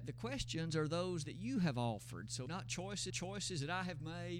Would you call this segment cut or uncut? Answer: cut